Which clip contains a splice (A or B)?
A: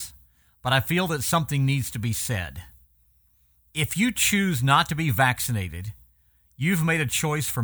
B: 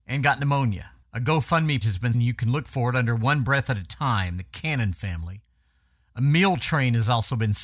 B